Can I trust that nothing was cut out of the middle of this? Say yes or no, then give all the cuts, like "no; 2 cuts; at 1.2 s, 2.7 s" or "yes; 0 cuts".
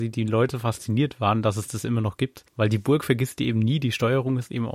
no; 1 cut; at 2.5 s